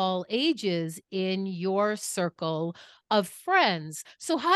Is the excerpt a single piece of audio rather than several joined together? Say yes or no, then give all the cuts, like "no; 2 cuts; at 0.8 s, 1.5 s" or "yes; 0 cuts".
yes; 0 cuts